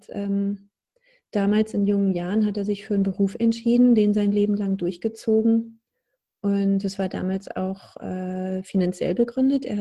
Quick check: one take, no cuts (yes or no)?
yes